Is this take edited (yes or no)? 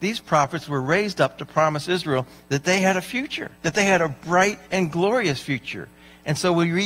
yes